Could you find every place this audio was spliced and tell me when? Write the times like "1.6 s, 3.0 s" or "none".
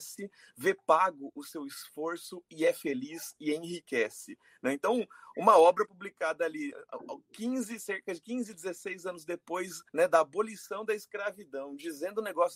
9.9 s